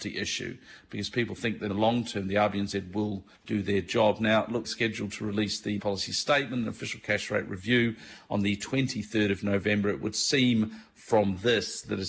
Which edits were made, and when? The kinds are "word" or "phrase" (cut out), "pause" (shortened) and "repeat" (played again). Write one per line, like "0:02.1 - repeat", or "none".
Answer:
0:01.7 - word
0:03.3 - pause
0:04.6 - phrase
0:05.8 - word